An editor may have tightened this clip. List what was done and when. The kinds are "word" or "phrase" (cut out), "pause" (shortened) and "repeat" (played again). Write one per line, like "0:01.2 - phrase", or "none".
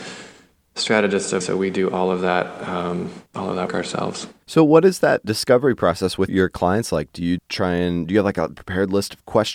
0:01.4 - phrase
0:03.3 - pause
0:03.7 - word
0:06.3 - word
0:07.4 - word
0:08.5 - phrase